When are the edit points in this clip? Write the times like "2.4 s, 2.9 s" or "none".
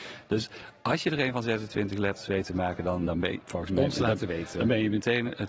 3.0 s